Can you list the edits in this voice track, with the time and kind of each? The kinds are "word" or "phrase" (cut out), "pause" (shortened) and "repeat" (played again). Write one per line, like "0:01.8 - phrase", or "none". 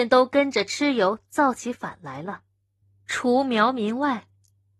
0:02.8 - pause